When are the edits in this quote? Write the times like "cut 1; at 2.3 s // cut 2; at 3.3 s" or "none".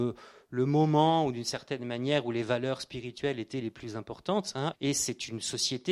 cut 1; at 4.7 s